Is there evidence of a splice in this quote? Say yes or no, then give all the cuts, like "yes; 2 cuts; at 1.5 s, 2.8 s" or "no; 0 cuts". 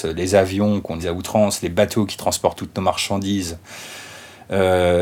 yes; 1 cut; at 1.0 s